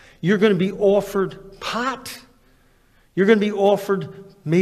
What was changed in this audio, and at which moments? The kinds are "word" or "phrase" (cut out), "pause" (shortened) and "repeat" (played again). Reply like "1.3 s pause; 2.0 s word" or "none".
none

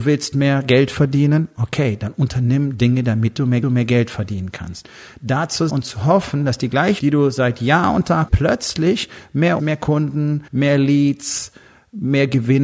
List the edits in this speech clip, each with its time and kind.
3.6 s repeat; 5.7 s word; 7.0 s word; 8.3 s phrase; 9.6 s word; 10.5 s pause

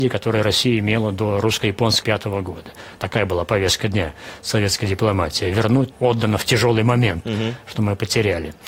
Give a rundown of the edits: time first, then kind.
2.0 s word; 5.9 s phrase

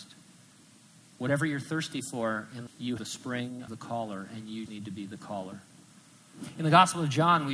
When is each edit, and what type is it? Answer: 2.7 s word; 3.0 s word; 3.7 s word; 4.7 s word

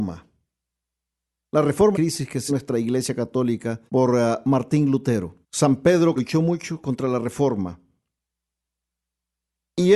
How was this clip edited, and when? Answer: 1.9 s phrase; 2.5 s phrase; 3.9 s pause; 5.4 s pause; 6.2 s word

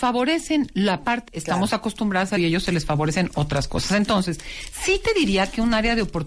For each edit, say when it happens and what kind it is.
1.3 s word; 2.4 s word

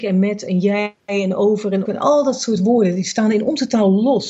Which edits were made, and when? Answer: 1.8 s word

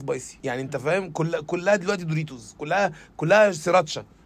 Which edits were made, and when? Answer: none

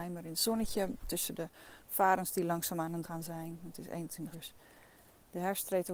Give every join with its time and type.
3.0 s word; 4.3 s word

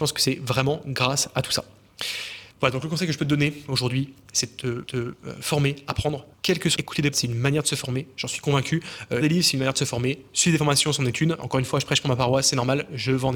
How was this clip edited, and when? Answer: 2.5 s pause; 4.9 s repeat; 6.3 s pause; 6.7 s phrase; 7.1 s word; 9.2 s word

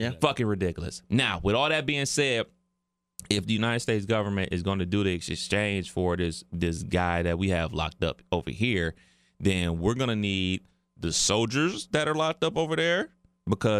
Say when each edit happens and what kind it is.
none

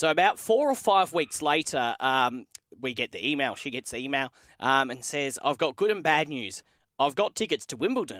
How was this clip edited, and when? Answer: none

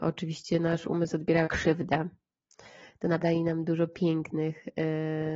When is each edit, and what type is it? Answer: 1.4 s word; 3.2 s word

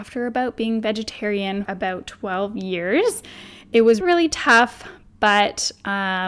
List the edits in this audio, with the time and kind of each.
1.7 s word; 4.0 s word

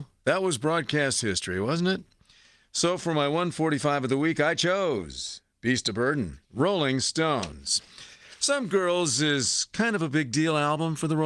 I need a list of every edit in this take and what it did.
6.4 s pause

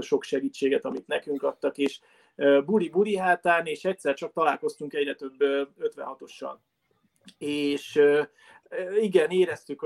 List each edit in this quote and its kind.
none

